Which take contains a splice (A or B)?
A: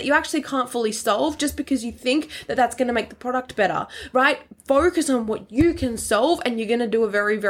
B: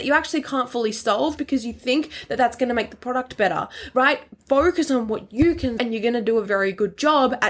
B